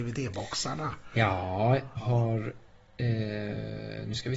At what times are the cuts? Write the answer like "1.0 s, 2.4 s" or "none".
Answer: 2.0 s